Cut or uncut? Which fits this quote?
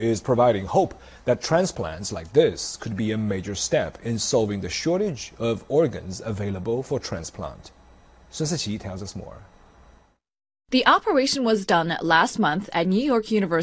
uncut